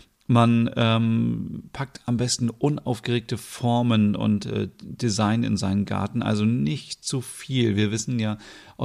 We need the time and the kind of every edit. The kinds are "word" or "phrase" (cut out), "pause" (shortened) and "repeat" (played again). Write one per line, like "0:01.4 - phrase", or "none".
none